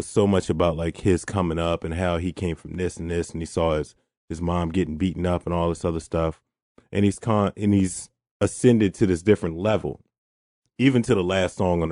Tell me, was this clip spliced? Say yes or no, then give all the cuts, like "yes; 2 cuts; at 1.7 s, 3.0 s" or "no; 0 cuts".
no; 0 cuts